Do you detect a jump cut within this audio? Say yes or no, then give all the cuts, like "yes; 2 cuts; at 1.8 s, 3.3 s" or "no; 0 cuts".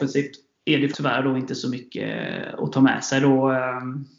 yes; 1 cut; at 0.9 s